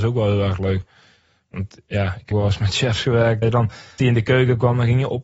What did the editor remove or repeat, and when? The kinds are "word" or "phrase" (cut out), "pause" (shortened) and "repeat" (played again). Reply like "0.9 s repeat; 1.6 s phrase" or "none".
2.3 s word; 3.4 s word; 4.0 s word